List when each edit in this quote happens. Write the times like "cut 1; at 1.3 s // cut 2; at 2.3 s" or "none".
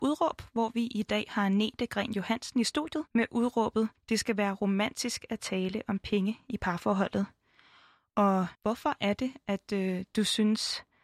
cut 1; at 3.1 s // cut 2; at 4.0 s // cut 3; at 8.5 s